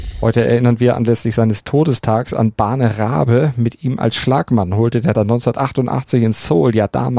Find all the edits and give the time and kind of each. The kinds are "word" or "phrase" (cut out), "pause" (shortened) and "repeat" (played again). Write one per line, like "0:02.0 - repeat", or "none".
0:05.1 - word